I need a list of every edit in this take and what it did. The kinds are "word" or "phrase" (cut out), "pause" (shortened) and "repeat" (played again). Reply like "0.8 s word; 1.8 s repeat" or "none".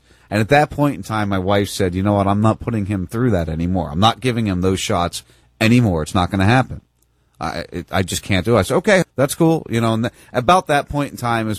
9.0 s word